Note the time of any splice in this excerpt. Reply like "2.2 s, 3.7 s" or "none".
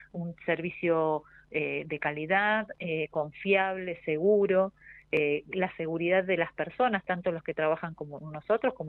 none